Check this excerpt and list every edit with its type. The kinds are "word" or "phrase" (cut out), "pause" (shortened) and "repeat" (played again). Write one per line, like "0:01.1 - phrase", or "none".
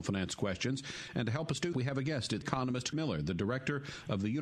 0:01.7 - word
0:02.4 - word
0:02.9 - word